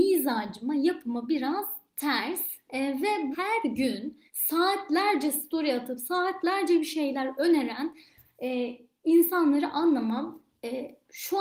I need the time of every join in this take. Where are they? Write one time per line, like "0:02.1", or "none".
0:03.3
0:04.3

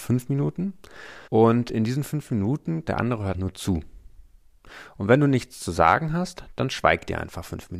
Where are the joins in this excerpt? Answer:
0:01.3
0:02.9
0:03.3

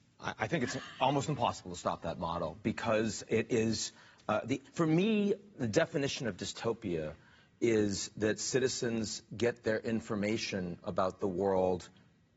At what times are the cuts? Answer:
none

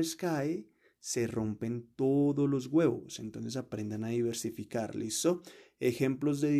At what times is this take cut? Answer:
none

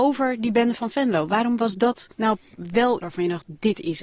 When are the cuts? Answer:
0:02.1
0:03.0

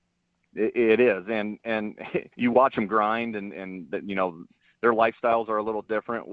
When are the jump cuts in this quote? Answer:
0:02.3

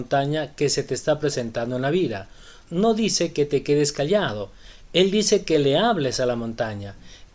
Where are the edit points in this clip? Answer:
none

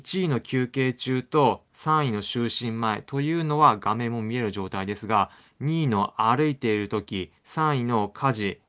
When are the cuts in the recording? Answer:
0:07.4

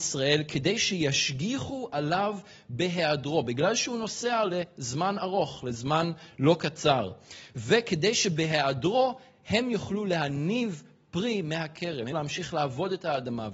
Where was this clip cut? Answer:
0:12.1

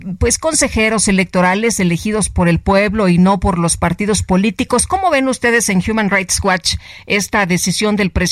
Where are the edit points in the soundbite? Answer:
none

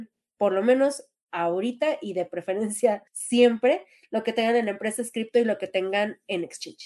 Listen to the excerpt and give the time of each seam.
0:03.1

